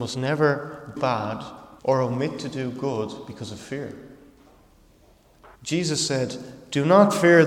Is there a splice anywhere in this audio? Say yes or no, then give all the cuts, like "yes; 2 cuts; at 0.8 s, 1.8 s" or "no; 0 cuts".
yes; 3 cuts; at 1.0 s, 1.8 s, 5.6 s